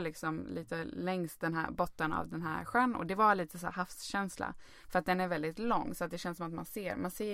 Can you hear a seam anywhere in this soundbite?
no; 0 cuts

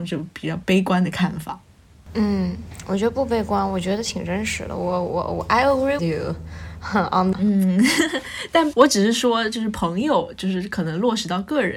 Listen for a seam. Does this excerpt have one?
yes; 2 cuts; at 6.0 s, 7.3 s

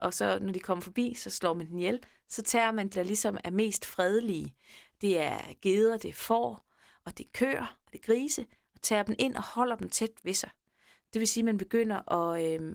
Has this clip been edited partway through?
yes; 1 cut; at 2.9 s

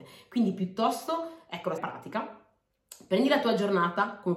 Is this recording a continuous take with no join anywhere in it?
no; 1 cut; at 1.8 s

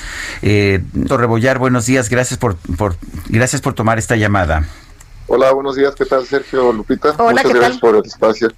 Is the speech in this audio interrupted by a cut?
yes; 1 cut; at 1.1 s

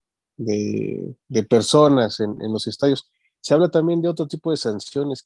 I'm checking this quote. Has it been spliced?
no; 0 cuts

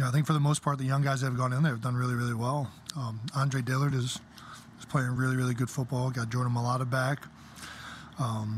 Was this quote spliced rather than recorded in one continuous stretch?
no; 0 cuts

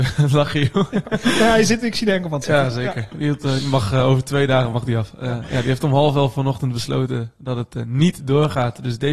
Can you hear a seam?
no; 0 cuts

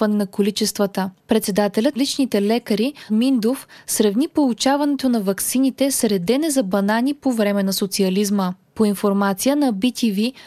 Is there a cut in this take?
yes; 2 cuts; at 2.0 s, 3.1 s

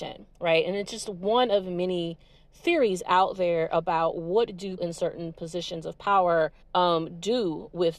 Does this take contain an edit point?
yes; 2 cuts; at 4.8 s, 6.6 s

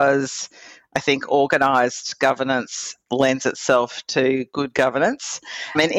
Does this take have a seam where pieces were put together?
no; 0 cuts

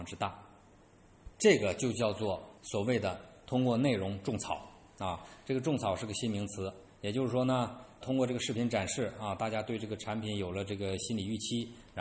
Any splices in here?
yes; 3 cuts; at 1.3 s, 2.6 s, 8.0 s

